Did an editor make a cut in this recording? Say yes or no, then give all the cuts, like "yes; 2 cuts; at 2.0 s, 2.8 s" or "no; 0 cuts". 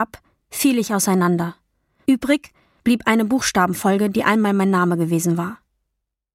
no; 0 cuts